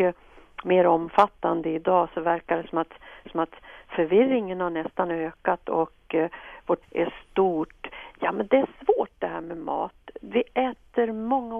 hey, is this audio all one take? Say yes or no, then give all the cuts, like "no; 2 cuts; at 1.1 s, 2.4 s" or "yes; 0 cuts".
no; 2 cuts; at 3.2 s, 6.8 s